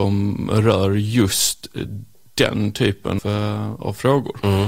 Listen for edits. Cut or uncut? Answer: cut